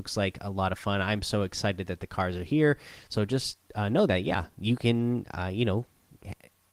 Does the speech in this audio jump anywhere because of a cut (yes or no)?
no